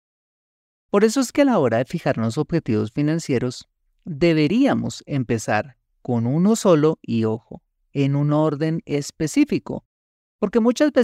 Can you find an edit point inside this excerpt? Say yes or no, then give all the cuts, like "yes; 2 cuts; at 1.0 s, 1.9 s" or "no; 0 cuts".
no; 0 cuts